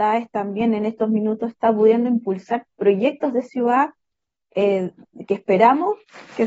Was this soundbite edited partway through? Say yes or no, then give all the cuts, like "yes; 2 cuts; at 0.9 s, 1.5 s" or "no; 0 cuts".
no; 0 cuts